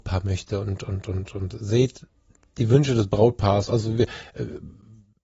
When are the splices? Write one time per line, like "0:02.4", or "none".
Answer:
none